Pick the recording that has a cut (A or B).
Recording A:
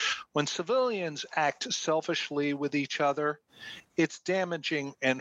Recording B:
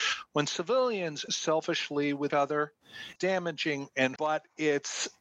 B